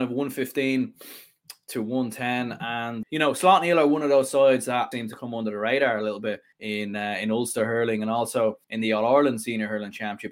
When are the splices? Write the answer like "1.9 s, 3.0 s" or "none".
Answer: 3.0 s, 4.9 s, 6.5 s, 8.6 s